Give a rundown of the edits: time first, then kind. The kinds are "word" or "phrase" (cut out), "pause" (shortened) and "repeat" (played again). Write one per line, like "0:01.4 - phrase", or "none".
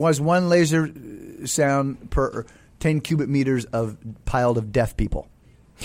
none